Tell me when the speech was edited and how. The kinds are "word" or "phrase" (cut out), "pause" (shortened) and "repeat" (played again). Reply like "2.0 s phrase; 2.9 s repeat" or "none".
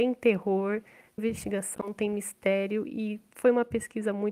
1.2 s word